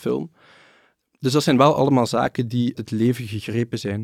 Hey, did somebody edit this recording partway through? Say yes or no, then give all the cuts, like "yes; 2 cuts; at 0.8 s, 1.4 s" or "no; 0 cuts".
yes; 1 cut; at 2.7 s